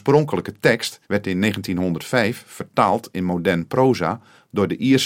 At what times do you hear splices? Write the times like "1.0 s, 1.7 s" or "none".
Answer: 1.0 s